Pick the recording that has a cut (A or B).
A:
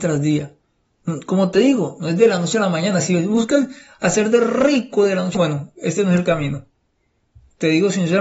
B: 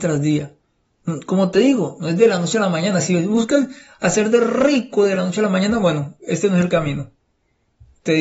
A